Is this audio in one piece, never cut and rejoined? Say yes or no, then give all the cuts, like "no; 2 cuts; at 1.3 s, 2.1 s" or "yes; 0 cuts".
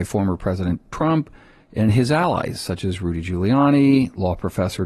yes; 0 cuts